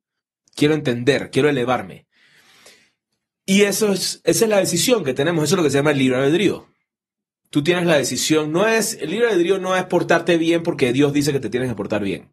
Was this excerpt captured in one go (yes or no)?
yes